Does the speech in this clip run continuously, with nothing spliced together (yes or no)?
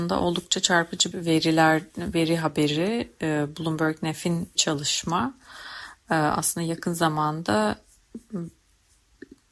no